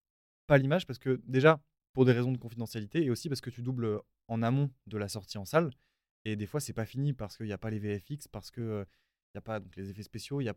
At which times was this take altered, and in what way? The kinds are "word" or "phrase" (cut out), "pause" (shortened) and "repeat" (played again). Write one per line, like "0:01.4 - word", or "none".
none

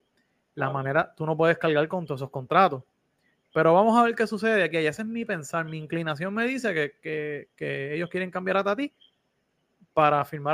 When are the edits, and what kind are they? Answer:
none

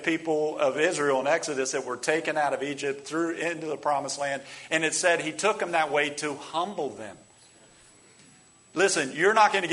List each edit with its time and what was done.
none

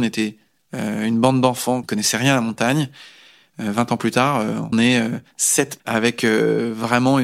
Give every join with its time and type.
0:01.8 - word
0:04.7 - word
0:05.8 - word

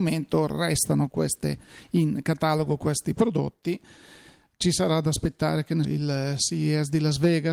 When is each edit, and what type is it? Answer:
0:05.8 - word

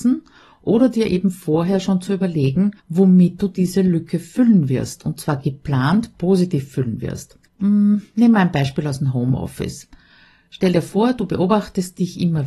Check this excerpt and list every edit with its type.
0:02.8 - pause
0:07.5 - pause

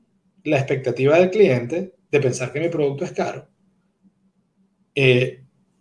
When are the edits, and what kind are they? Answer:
none

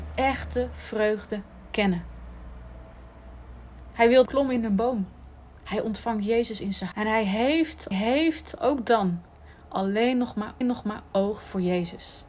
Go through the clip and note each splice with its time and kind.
0:04.3 - phrase
0:06.9 - word
0:07.9 - repeat
0:10.6 - repeat

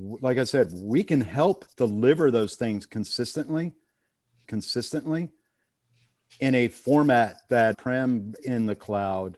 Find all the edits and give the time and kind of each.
0:01.7 - pause
0:04.4 - repeat
0:07.7 - phrase
0:08.4 - word

